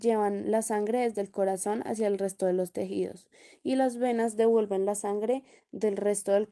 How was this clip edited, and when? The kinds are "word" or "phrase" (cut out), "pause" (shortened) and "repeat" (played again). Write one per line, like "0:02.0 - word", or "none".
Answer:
none